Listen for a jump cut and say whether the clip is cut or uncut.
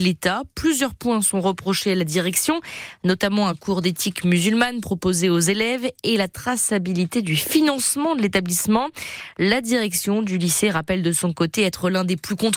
uncut